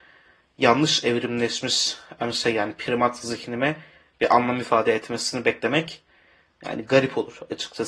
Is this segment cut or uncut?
uncut